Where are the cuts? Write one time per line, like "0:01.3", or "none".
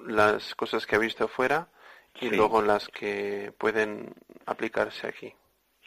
none